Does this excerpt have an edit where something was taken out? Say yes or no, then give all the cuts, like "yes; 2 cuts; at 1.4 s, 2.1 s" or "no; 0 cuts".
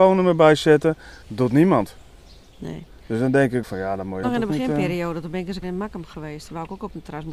yes; 4 cuts; at 1.2 s, 3.6 s, 4.2 s, 5.6 s